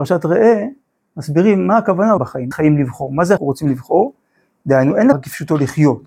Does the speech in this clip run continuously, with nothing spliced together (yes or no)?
no